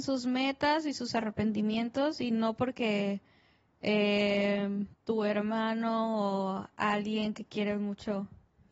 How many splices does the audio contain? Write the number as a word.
one